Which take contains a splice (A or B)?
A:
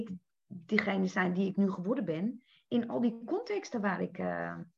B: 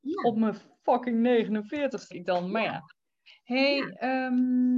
B